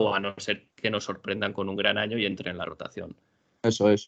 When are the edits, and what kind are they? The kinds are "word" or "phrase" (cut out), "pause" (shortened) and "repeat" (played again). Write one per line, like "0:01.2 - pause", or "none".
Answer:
none